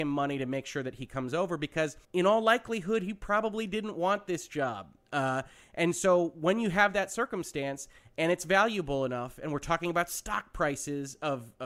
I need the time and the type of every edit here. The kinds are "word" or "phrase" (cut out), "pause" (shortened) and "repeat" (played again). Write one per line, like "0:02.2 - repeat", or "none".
0:02.0 - pause